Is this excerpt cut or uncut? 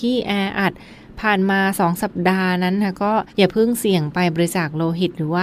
cut